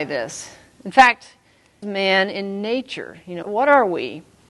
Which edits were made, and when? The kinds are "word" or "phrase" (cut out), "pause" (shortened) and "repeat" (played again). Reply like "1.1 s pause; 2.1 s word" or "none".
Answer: 1.8 s phrase; 3.4 s word